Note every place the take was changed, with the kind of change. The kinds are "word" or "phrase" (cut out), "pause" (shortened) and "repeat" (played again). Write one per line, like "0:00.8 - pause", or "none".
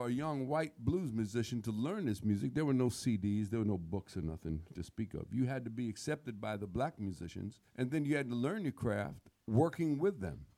0:07.7 - pause